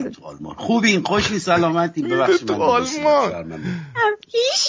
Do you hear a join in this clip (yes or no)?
no